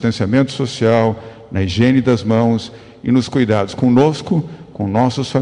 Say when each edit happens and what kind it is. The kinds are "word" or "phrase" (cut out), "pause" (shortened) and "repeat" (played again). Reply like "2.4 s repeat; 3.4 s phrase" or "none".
none